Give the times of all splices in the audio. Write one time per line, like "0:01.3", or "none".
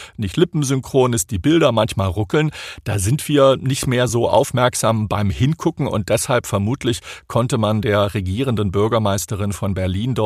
none